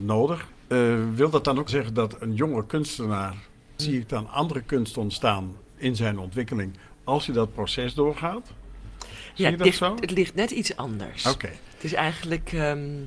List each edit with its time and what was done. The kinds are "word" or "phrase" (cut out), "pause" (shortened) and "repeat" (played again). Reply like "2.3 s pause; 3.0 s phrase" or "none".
none